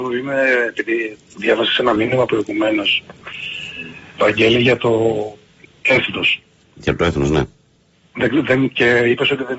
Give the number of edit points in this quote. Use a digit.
0